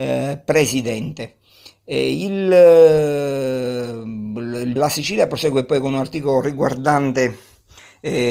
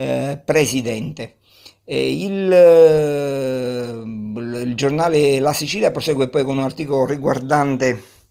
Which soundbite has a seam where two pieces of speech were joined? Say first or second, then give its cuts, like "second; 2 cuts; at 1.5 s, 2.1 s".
first; 1 cut; at 4.8 s